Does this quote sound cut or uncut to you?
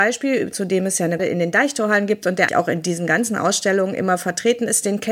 cut